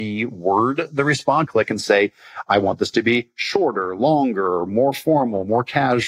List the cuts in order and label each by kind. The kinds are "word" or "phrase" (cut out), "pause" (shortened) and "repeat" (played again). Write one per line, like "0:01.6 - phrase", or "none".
0:01.5 - phrase